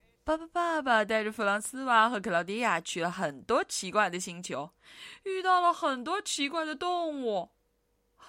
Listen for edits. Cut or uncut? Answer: uncut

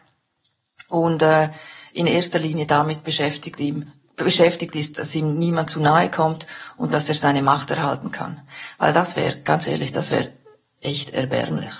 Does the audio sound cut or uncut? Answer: uncut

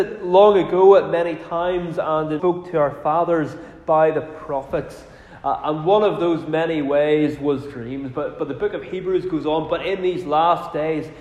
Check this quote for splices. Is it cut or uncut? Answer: cut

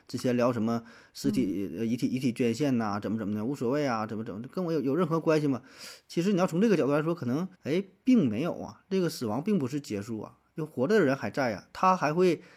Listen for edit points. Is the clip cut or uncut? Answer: cut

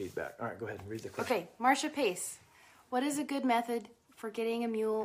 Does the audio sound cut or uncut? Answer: uncut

